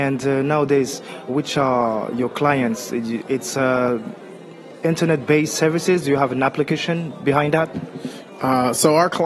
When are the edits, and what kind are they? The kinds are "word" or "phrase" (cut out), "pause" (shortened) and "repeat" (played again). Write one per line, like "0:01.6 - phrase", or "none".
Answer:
0:01.3 - word

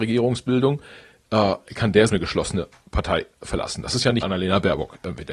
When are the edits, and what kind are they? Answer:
0:02.1 - phrase
0:04.2 - phrase

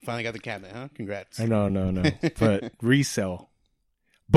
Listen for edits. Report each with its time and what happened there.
none

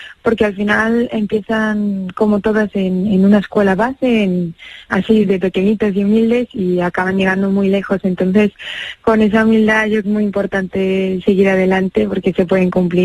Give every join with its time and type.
0:05.2 - word
0:10.0 - phrase

